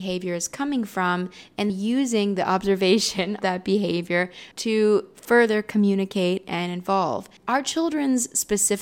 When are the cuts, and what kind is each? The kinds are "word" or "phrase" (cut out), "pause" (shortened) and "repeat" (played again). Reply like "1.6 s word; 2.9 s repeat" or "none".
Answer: 1.7 s word; 3.4 s word; 4.5 s pause; 7.4 s pause